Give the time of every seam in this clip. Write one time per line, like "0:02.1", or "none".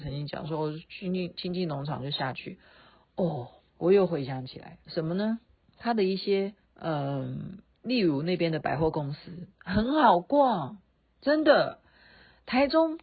0:03.6
0:04.8
0:05.6
0:06.6
0:07.7
0:09.5